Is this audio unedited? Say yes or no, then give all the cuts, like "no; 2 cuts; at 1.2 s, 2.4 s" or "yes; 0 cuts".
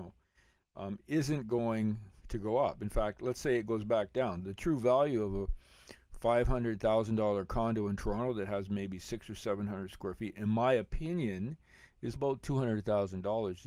no; 1 cut; at 12.1 s